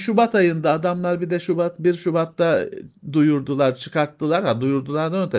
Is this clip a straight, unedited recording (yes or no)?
yes